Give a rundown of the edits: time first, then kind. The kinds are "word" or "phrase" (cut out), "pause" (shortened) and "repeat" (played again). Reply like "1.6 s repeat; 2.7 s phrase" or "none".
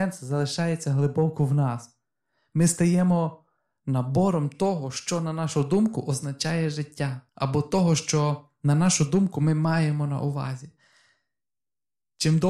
7.3 s pause

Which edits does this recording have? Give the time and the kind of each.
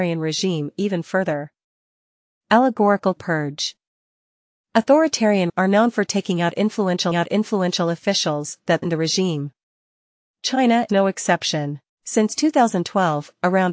3.2 s word; 5.5 s word; 7.1 s repeat; 8.8 s word; 10.9 s word; 11.9 s pause

